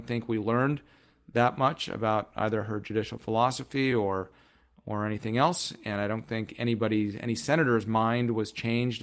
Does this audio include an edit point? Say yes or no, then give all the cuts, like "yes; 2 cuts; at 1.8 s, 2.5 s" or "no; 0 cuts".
no; 0 cuts